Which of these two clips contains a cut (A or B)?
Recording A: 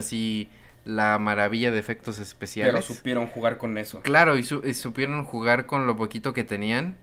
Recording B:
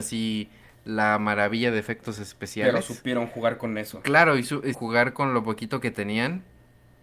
B